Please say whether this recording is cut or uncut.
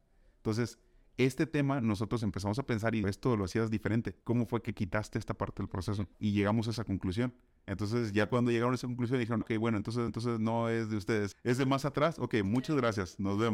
cut